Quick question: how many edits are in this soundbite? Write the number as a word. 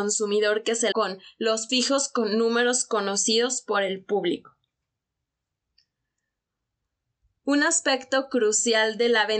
two